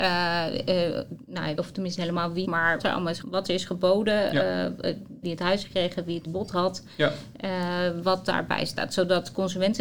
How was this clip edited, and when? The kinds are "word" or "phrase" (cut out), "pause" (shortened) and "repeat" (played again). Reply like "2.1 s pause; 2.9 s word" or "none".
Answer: 1.6 s word; 2.0 s word; 2.4 s word; 2.8 s word; 3.2 s word; 5.2 s word; 5.6 s word; 6.3 s word